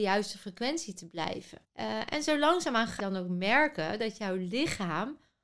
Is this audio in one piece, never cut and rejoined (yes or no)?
no